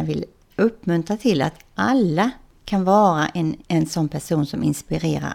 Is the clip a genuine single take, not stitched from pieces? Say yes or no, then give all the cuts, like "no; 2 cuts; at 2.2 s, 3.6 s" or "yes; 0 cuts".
no; 1 cut; at 3.6 s